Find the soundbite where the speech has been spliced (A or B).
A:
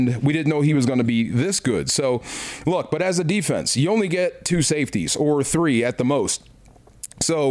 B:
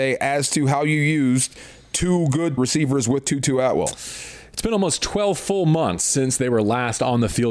B